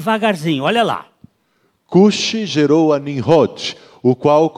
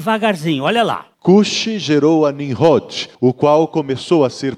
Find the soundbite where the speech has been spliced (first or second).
second